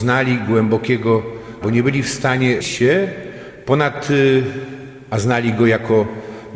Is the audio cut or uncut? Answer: cut